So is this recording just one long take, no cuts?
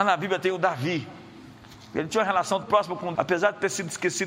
no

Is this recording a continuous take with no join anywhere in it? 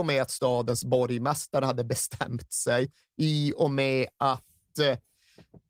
yes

